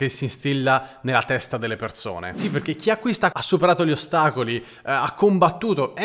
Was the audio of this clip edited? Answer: yes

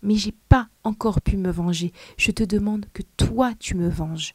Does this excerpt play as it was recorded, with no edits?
yes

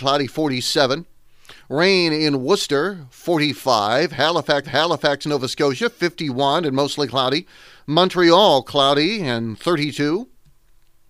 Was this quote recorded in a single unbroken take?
no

